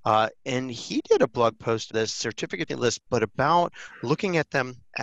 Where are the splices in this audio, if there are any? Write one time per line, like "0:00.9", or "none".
0:01.9
0:02.7